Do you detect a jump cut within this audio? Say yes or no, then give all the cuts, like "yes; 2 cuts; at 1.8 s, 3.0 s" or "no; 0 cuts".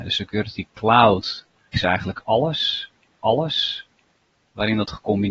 yes; 2 cuts; at 1.7 s, 3.2 s